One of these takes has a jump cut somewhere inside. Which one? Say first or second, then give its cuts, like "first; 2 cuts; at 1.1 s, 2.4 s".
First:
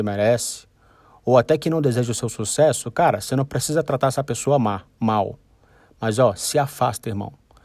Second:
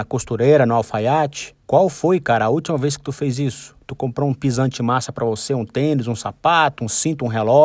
second; 1 cut; at 1.6 s